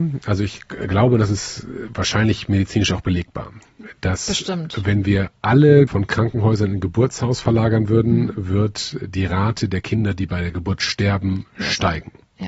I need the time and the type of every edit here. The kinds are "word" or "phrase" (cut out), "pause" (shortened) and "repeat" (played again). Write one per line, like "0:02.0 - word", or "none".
0:05.9 - word